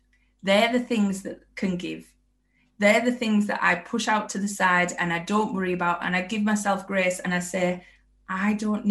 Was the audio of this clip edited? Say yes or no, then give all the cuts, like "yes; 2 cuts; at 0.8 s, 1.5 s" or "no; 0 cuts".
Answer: no; 0 cuts